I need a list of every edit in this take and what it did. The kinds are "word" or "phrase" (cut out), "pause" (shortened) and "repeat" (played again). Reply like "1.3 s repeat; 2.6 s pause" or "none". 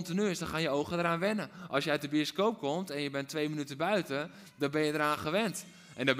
none